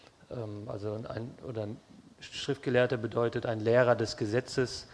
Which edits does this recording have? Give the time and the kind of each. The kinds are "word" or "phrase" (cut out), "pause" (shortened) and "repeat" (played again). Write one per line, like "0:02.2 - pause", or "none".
0:02.1 - pause